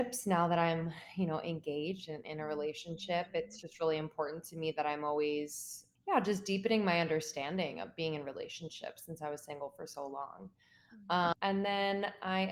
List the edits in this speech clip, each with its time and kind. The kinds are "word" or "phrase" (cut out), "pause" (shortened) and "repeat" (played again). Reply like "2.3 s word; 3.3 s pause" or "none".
none